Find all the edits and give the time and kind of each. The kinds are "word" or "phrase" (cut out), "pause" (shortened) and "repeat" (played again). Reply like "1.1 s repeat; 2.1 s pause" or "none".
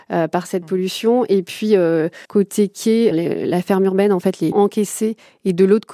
2.3 s pause; 3.1 s word; 4.5 s phrase

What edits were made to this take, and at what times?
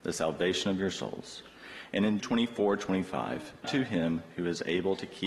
2.2 s word; 3.6 s word

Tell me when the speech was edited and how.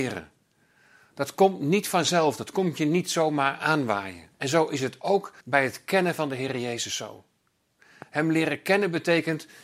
4.3 s pause; 5.4 s pause

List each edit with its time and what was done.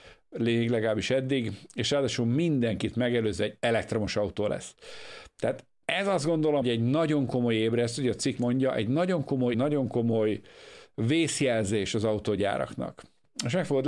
6.6 s word; 8.4 s word; 9.5 s word

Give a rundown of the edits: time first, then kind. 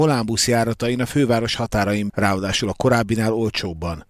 2.1 s word

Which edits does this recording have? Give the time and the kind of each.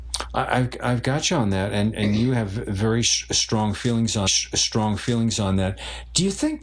4.3 s repeat

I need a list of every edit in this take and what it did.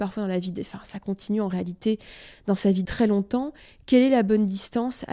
2.9 s word

